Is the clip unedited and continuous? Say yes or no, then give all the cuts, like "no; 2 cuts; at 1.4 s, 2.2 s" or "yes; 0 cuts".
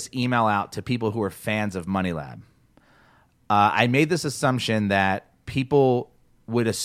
yes; 0 cuts